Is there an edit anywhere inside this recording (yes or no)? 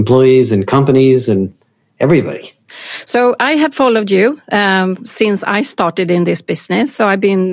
no